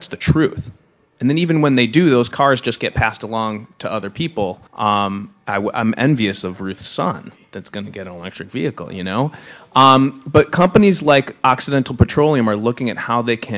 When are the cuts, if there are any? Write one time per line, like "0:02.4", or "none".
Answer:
0:04.7